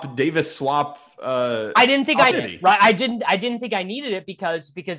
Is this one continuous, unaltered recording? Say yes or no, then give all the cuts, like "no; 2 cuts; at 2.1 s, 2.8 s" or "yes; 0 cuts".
no; 1 cut; at 2.3 s